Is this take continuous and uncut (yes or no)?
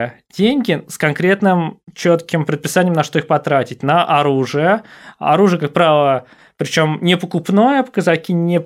yes